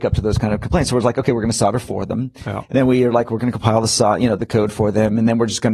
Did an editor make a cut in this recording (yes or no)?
yes